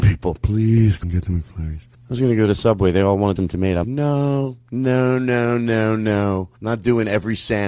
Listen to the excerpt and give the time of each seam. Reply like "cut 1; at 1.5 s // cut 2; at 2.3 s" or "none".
cut 1; at 1.0 s // cut 2; at 1.9 s // cut 3; at 3.4 s // cut 4; at 3.8 s // cut 5; at 6.6 s

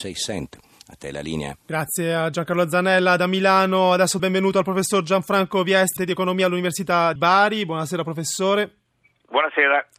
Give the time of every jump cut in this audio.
cut 1; at 1.6 s // cut 2; at 4.2 s // cut 3; at 6.0 s // cut 4; at 7.2 s

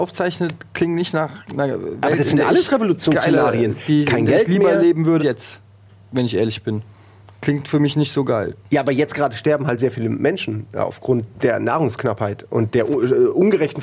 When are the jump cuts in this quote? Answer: cut 1; at 1.5 s // cut 2; at 5.2 s // cut 3; at 8.6 s

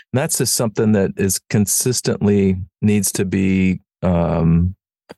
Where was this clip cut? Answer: cut 1; at 2.7 s

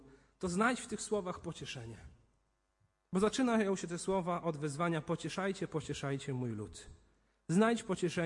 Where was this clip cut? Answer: none

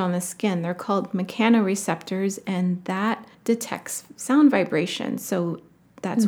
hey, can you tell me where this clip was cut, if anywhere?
cut 1; at 3.3 s

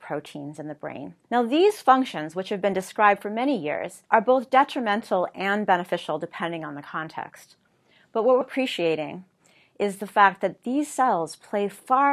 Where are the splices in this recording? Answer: cut 1; at 1.2 s // cut 2; at 4.1 s // cut 3; at 8.4 s

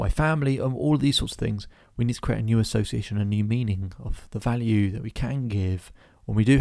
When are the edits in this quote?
none

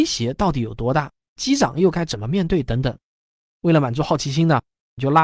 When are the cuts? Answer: none

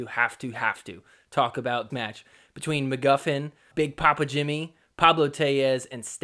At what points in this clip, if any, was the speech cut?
cut 1; at 1.9 s // cut 2; at 3.7 s

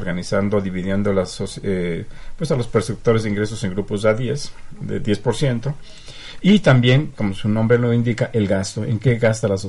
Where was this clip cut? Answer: cut 1; at 4.8 s

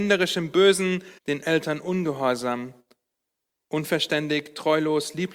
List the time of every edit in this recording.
cut 1; at 1.2 s

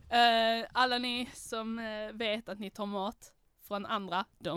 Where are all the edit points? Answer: none

